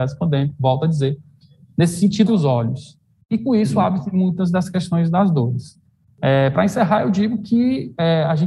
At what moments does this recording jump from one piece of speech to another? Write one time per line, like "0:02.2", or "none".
0:02.3